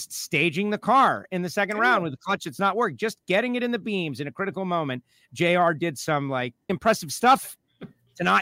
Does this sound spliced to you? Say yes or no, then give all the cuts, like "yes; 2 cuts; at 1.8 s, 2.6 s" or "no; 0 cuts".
yes; 1 cut; at 6.7 s